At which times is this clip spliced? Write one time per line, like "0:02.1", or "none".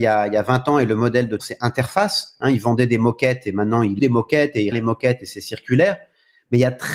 0:01.4
0:04.0
0:04.7